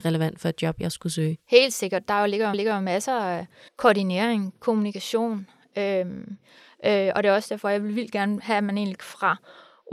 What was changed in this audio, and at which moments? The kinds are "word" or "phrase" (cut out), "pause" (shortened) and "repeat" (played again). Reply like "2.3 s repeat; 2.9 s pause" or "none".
1.4 s pause; 2.5 s repeat; 3.7 s pause; 9.0 s phrase